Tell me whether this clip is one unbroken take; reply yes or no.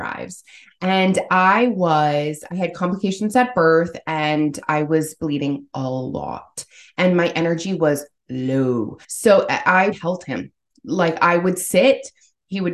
no